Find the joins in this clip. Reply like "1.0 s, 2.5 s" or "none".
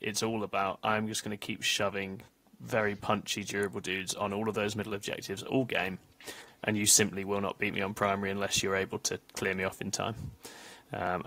none